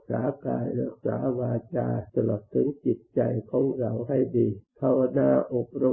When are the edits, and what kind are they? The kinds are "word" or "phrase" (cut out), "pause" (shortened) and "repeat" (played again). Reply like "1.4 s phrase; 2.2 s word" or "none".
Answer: 2.1 s pause; 4.7 s pause